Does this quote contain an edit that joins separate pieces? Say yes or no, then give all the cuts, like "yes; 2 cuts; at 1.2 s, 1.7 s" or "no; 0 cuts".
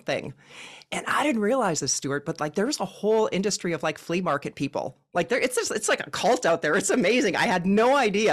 no; 0 cuts